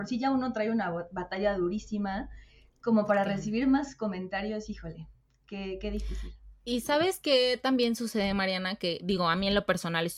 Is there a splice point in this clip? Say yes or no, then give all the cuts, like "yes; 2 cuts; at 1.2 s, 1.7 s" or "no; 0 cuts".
no; 0 cuts